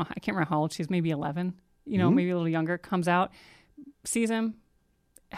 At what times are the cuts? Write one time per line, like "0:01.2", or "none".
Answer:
0:03.9